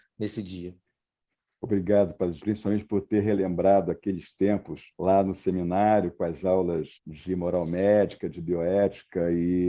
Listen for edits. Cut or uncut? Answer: cut